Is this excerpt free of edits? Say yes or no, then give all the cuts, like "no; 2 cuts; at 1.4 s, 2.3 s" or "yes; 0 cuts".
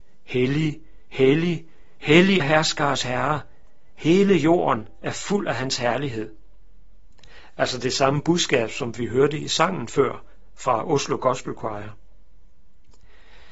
no; 1 cut; at 2.4 s